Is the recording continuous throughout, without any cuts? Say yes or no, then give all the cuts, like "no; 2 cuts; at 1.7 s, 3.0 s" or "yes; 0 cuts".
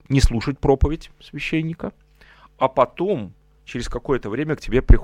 yes; 0 cuts